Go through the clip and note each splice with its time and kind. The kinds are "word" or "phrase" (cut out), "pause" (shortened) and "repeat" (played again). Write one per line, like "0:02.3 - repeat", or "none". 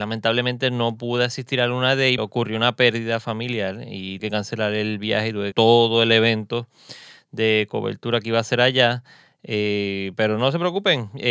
0:02.2 - word
0:04.2 - word
0:05.5 - word